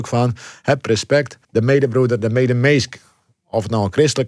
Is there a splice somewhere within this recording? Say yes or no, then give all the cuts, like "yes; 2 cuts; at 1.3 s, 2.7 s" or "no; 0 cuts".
yes; 1 cut; at 1.4 s